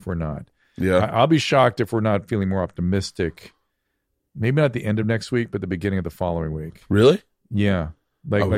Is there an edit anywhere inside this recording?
no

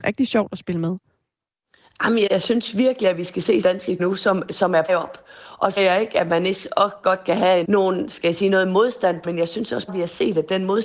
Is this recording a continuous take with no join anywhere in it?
no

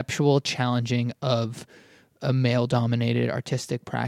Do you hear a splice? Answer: no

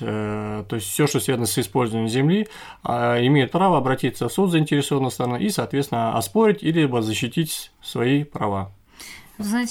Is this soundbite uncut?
yes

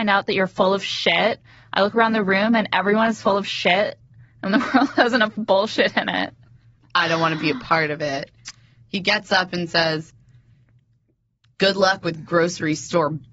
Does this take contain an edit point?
no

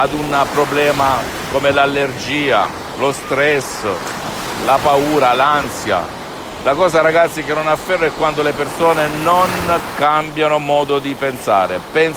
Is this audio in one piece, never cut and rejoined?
yes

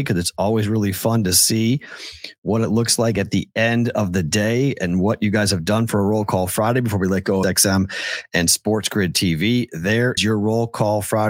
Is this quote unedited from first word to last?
no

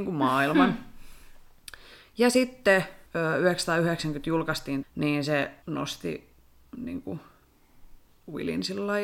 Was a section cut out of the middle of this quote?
yes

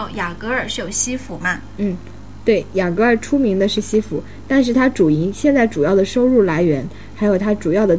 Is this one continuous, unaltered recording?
yes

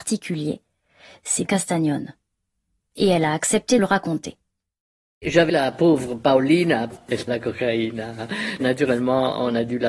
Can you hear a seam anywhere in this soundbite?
yes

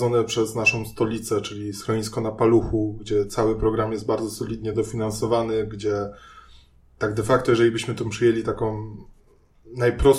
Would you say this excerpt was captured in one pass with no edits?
yes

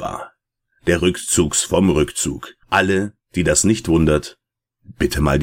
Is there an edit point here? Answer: yes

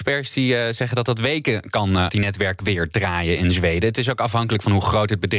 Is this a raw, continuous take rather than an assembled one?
no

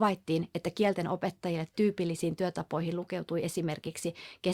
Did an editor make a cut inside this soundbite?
no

